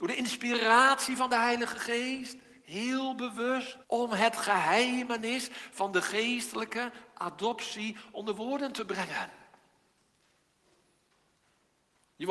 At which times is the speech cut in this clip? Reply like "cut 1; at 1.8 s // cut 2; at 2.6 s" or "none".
cut 1; at 3.8 s

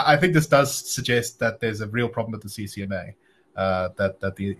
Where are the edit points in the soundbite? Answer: none

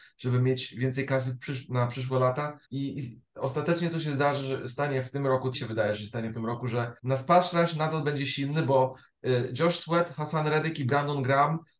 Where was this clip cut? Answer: cut 1; at 2.6 s // cut 2; at 5.5 s // cut 3; at 7.0 s

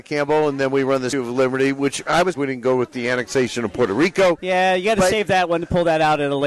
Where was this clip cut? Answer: cut 1; at 1.1 s // cut 2; at 2.3 s

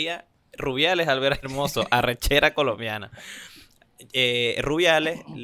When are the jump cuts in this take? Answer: cut 1; at 1.4 s

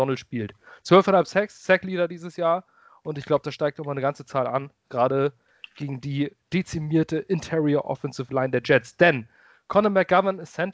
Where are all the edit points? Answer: none

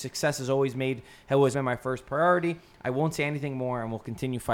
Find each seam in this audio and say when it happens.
cut 1; at 1.5 s

